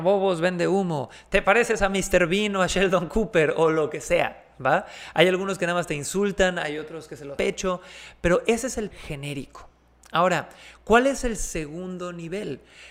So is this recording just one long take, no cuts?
no; 2 cuts; at 7.4 s, 8.9 s

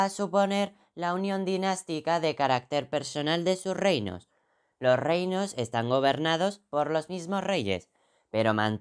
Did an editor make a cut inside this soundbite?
no; 0 cuts

